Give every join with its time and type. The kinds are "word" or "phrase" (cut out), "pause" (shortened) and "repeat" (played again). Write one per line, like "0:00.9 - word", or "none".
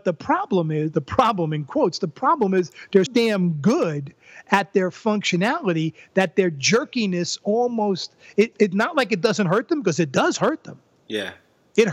0:03.1 - word
0:08.5 - word